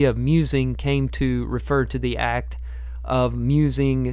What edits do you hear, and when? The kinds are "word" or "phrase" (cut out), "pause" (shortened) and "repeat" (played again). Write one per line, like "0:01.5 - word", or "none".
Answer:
none